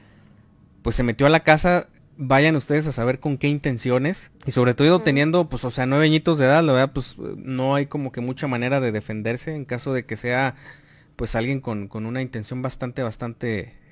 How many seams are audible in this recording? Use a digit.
1